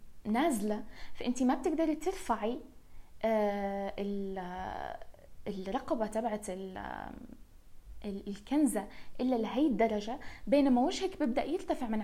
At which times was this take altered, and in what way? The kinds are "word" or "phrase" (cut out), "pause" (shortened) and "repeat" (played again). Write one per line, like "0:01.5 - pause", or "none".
none